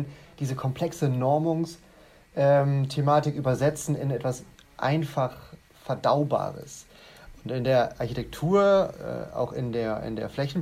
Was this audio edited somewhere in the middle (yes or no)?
no